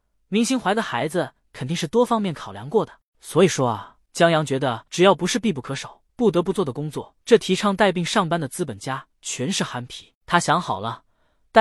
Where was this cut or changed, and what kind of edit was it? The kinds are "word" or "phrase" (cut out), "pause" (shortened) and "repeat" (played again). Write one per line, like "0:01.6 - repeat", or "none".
0:03.1 - pause
0:04.9 - pause
0:06.1 - pause
0:07.2 - pause